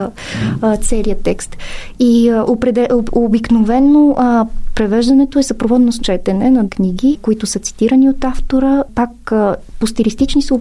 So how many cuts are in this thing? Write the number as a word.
three